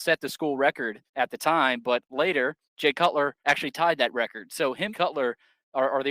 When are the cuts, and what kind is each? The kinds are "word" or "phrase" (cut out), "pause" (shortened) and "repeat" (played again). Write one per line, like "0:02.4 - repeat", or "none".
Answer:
0:01.1 - pause
0:02.6 - pause
0:03.4 - pause
0:04.9 - phrase